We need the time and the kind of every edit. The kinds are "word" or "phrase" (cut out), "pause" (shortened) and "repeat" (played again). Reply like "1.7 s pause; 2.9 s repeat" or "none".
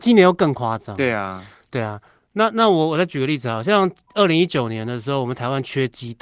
none